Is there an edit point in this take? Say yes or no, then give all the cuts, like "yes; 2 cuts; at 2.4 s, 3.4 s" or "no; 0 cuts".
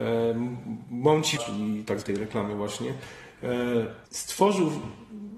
yes; 3 cuts; at 1.4 s, 2.0 s, 4.1 s